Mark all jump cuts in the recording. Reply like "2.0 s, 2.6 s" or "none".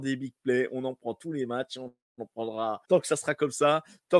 2.8 s